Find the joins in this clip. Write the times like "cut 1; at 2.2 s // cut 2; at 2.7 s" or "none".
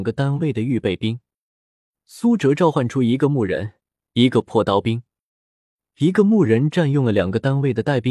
none